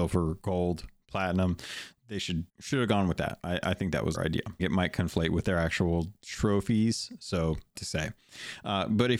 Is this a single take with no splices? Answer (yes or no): no